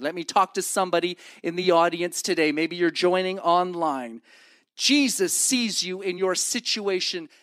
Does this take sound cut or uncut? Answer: uncut